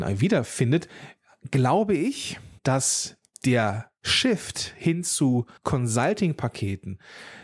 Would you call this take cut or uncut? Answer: cut